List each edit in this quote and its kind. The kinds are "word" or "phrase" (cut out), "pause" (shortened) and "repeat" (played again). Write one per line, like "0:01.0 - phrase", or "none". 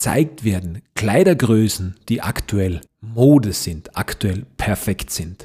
0:02.9 - pause